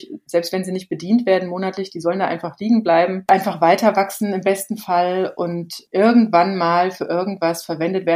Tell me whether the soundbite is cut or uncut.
uncut